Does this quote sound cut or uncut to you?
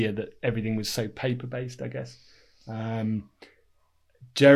uncut